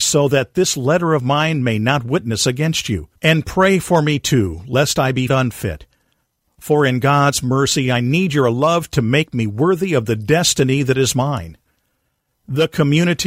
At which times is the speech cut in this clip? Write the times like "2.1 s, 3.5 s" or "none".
3.2 s, 5.3 s